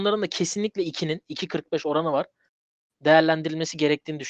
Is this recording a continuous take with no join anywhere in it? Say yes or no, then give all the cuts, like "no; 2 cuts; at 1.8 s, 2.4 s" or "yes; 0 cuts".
yes; 0 cuts